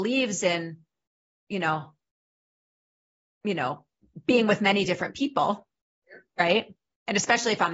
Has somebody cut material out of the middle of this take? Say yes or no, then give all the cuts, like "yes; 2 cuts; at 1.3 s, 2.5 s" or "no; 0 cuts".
no; 0 cuts